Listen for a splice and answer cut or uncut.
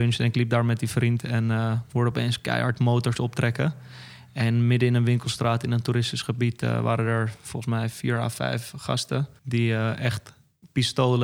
cut